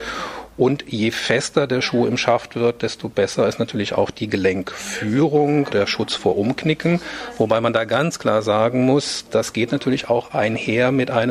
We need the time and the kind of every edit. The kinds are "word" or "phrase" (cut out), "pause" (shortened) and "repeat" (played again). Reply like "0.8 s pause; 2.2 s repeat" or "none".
5.7 s word